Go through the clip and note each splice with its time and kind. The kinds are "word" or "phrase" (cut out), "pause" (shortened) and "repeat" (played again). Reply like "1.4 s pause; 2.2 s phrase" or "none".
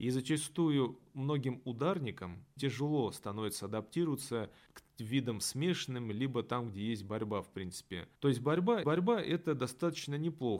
2.6 s word; 4.7 s pause; 8.2 s pause; 8.8 s repeat